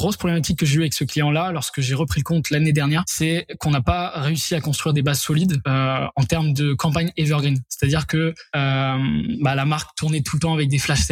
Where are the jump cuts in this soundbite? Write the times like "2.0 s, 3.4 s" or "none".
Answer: none